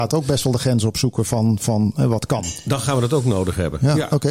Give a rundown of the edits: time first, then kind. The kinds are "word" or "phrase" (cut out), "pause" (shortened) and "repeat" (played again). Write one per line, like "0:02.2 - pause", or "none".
none